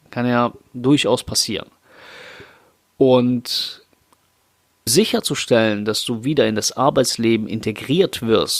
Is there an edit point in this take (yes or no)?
yes